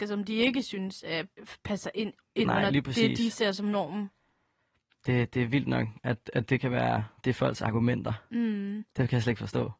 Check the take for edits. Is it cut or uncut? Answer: cut